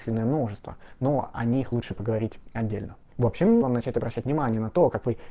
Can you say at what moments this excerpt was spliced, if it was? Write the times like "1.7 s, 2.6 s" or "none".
3.6 s